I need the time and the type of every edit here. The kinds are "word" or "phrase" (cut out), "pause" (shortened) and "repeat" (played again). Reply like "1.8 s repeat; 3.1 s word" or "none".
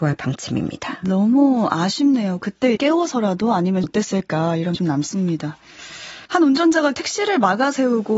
2.8 s word; 3.8 s phrase; 4.7 s word; 6.3 s pause; 6.9 s word